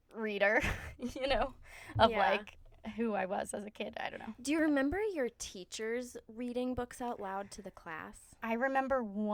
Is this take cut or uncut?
uncut